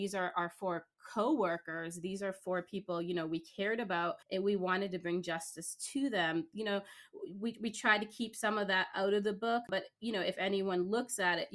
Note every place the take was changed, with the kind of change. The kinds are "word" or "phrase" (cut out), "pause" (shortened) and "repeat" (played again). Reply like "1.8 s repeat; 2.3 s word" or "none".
4.2 s pause

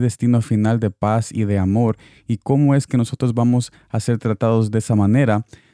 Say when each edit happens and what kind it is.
none

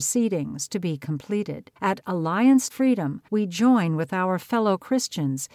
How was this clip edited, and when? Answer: 1.8 s pause; 2.7 s word; 3.3 s pause

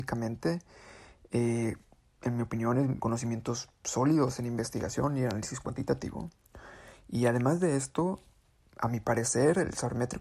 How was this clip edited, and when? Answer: 3.0 s word

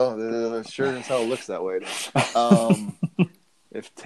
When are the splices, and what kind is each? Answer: 1.8 s word

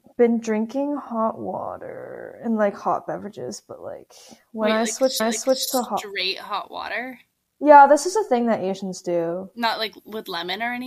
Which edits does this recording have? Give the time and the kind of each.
5.2 s repeat

